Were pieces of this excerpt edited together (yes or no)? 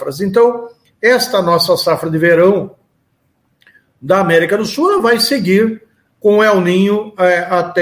no